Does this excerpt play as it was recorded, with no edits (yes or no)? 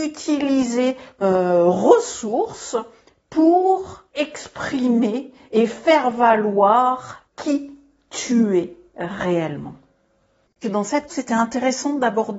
no